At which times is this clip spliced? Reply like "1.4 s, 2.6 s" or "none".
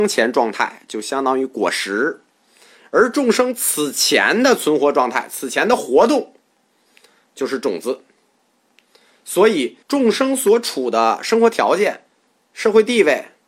9.8 s